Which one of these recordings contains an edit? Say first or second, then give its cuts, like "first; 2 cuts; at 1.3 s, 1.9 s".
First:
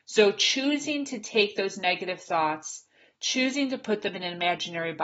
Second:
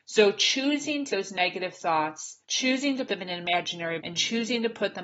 second; 4 cuts; at 1.1 s, 2.4 s, 3.1 s, 4.0 s